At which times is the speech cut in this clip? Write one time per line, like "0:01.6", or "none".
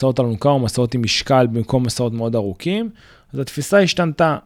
none